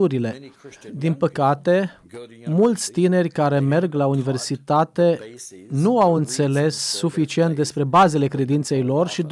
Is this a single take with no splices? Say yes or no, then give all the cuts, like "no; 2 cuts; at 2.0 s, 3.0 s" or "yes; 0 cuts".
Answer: yes; 0 cuts